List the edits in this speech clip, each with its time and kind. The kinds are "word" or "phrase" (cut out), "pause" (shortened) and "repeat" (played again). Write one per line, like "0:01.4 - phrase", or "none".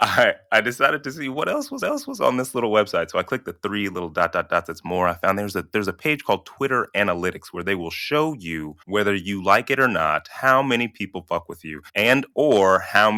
0:01.8 - repeat
0:08.8 - pause
0:11.9 - pause

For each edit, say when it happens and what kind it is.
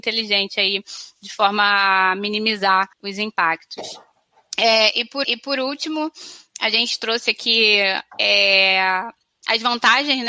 0:02.9 - pause
0:05.2 - repeat

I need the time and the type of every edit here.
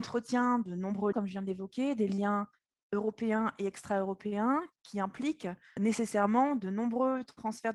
0:01.1 - word
0:05.8 - word

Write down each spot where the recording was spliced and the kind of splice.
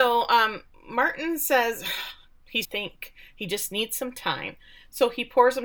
0:02.6 - phrase

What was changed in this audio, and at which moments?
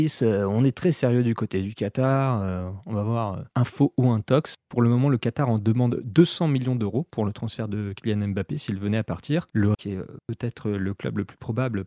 0:09.7 - word

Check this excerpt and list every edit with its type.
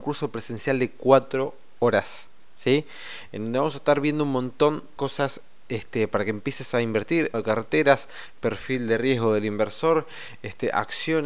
0:05.0 - word
0:07.3 - word

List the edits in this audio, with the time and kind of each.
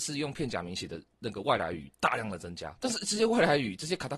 0:02.8 - word

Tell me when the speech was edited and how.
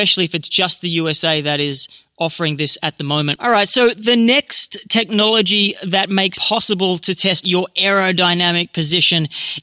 0:06.3 - word
0:07.4 - word

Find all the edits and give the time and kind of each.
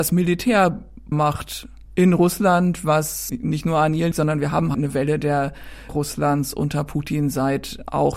0:01.1 - word
0:01.9 - pause
0:03.3 - word
0:04.1 - word
0:04.7 - word
0:05.9 - word

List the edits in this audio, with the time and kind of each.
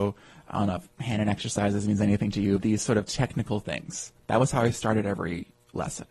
none

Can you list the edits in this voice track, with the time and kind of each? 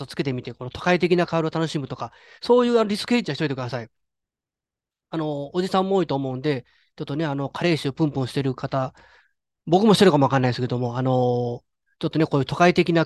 none

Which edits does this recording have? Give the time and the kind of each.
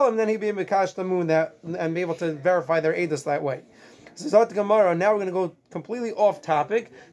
none

